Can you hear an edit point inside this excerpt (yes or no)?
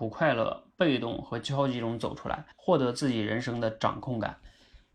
yes